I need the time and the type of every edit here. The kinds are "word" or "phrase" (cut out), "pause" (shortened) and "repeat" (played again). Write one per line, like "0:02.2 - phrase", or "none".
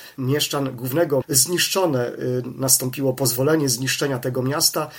0:01.2 - word